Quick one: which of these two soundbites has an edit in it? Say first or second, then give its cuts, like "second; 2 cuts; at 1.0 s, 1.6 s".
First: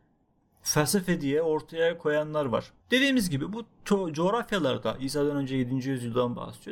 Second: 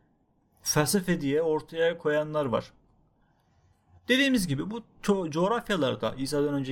first; 1 cut; at 2.8 s